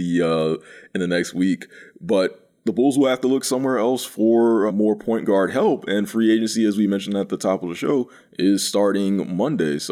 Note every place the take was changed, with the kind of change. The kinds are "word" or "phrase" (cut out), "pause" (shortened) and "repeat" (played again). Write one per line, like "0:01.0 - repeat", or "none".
0:04.7 - word